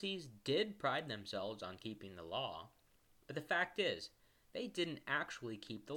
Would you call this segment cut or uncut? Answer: uncut